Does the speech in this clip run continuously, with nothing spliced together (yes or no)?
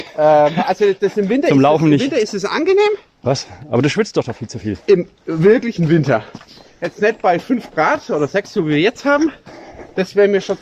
yes